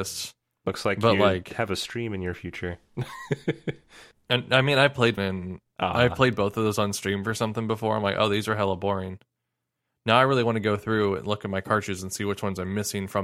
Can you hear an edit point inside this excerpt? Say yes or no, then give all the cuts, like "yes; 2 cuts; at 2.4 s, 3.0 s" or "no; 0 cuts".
yes; 1 cut; at 5.2 s